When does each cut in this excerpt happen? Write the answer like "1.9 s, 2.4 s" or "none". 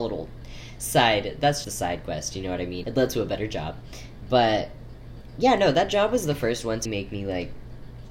1.6 s, 2.8 s, 6.9 s